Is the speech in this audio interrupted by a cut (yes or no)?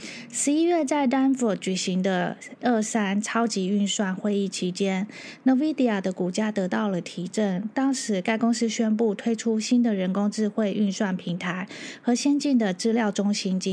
yes